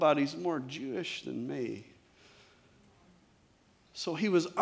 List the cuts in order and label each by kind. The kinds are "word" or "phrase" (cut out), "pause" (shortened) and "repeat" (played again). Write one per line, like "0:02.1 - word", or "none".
none